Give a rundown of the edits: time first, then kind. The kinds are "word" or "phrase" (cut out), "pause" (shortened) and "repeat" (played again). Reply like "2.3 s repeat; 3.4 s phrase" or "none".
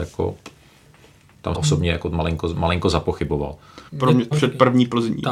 1.5 s phrase; 3.9 s pause; 4.3 s word